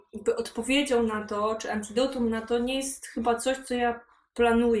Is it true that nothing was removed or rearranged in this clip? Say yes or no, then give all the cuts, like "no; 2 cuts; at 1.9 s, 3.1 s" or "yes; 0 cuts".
yes; 0 cuts